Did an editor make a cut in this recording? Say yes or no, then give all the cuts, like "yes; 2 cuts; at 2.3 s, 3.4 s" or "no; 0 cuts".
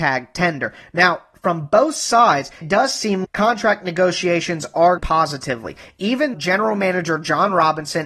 yes; 4 cuts; at 2.6 s, 3.2 s, 5.0 s, 6.3 s